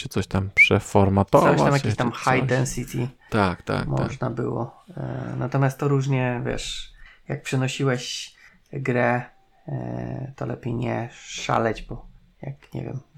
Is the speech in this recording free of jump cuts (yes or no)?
yes